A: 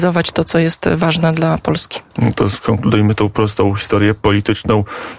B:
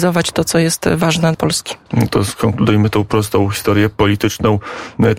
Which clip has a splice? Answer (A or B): B